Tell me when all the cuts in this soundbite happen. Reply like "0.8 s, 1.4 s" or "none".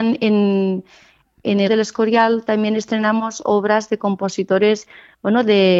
1.7 s